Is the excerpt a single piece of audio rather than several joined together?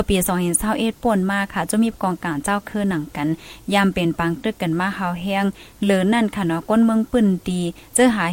yes; 0 cuts

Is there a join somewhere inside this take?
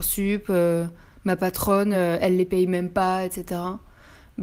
no; 0 cuts

